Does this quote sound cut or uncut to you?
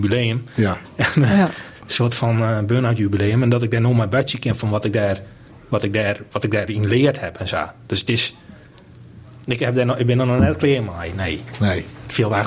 uncut